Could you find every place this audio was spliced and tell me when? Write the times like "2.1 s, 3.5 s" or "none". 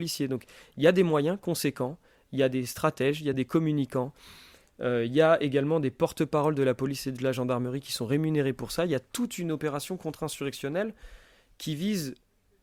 none